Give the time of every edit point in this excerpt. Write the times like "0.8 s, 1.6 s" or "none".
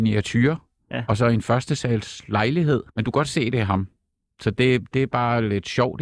2.9 s

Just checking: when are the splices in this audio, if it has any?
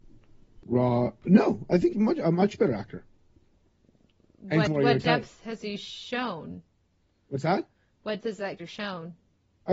1.9 s, 4.7 s, 8.2 s, 8.6 s

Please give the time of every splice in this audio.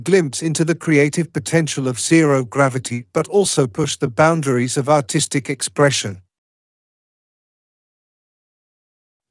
none

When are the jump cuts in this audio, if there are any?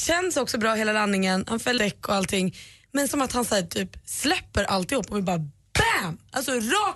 1.8 s, 3.1 s

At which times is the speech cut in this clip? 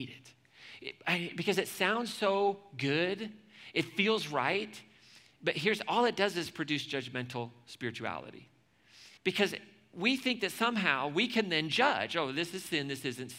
9.2 s

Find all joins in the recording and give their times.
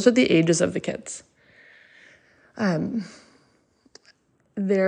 none

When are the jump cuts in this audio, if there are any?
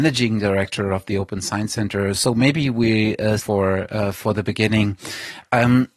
3.4 s

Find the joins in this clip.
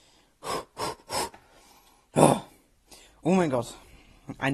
none

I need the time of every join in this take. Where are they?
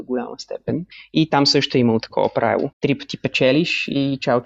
0.9 s, 2.7 s

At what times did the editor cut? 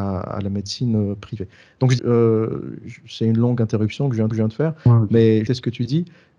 2.0 s, 4.3 s, 5.5 s

